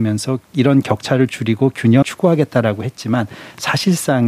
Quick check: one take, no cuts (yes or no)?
no